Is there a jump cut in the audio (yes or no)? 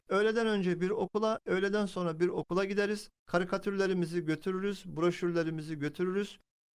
no